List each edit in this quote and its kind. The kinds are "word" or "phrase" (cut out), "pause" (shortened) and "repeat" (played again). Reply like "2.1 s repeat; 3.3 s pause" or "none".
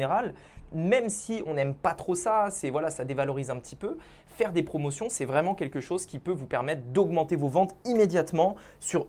none